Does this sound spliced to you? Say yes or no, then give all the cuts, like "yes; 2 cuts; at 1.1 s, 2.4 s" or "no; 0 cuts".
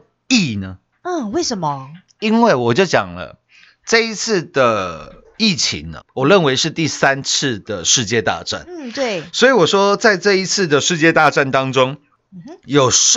yes; 1 cut; at 6.0 s